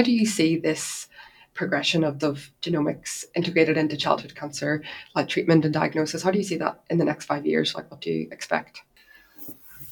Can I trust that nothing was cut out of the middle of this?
no; 1 cut; at 2.2 s

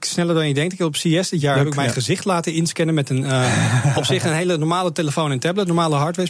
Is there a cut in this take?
no; 0 cuts

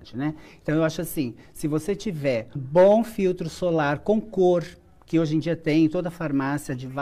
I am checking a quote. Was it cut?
yes; 1 cut; at 2.6 s

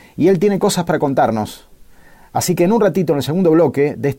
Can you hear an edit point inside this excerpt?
no; 0 cuts

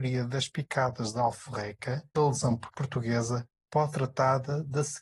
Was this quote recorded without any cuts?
no; 3 cuts; at 2.1 s, 2.7 s, 3.9 s

